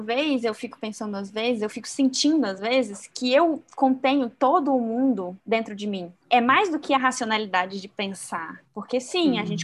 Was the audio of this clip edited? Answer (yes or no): no